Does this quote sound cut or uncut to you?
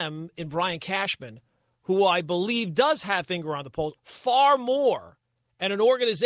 cut